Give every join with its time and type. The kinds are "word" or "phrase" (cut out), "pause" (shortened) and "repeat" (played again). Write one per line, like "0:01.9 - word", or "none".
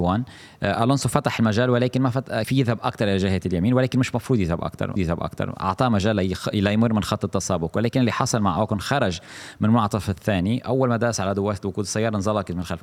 0:02.4 - word
0:05.0 - repeat